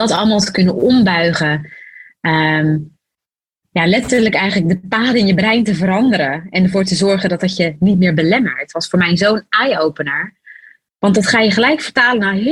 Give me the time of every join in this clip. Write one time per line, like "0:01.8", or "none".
none